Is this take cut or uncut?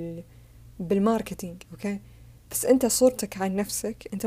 uncut